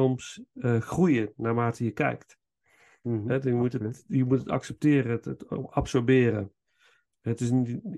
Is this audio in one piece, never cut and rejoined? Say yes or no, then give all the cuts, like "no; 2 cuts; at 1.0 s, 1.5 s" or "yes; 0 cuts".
yes; 0 cuts